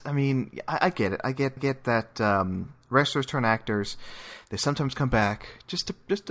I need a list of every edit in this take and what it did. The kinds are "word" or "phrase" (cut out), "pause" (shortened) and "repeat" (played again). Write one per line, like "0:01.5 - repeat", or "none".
0:01.6 - repeat